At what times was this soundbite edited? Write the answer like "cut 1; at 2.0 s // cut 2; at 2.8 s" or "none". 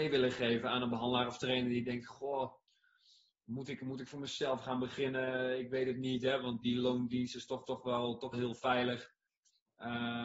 cut 1; at 6.6 s // cut 2; at 7.6 s // cut 3; at 8.3 s